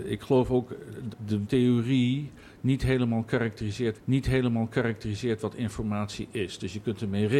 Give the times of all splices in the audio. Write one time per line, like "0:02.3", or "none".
0:01.1
0:01.4
0:03.9